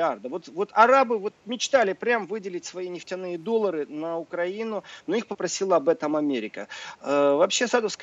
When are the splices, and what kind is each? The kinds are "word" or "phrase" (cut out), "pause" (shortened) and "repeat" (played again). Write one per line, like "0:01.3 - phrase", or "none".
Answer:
none